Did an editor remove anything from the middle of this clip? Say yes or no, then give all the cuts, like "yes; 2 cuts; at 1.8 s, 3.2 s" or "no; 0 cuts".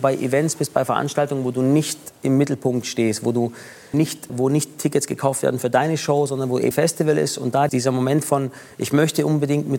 yes; 4 cuts; at 3.9 s, 4.3 s, 6.7 s, 7.7 s